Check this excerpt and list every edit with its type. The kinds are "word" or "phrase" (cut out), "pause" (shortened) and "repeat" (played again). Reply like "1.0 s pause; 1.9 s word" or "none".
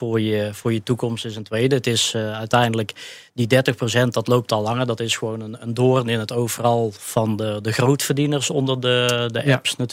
none